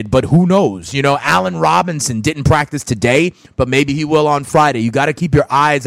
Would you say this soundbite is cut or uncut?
uncut